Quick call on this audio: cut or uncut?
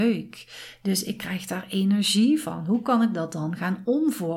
uncut